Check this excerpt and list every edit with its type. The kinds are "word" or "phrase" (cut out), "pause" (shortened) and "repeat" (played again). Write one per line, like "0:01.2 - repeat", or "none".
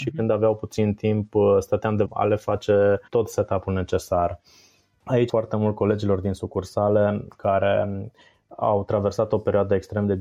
0:02.0 - phrase
0:03.1 - pause
0:05.3 - phrase